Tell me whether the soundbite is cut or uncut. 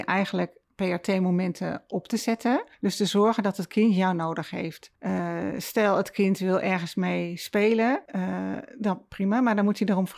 cut